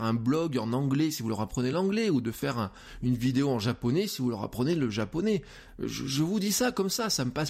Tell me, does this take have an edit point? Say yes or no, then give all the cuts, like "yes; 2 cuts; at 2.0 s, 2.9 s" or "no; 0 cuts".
no; 0 cuts